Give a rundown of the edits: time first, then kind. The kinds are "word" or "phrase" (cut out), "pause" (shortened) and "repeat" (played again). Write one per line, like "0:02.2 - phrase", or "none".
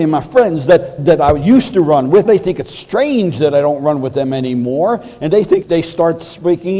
0:01.0 - word
0:02.3 - word
0:05.6 - word

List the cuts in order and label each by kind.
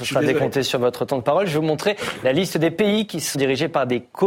0:03.3 - word

